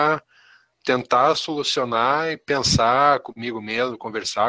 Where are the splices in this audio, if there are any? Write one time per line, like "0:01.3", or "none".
none